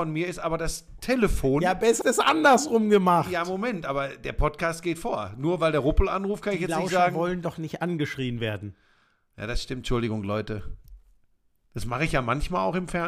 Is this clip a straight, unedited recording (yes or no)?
no